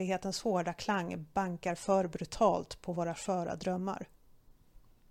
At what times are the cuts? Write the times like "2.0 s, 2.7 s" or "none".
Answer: 3.2 s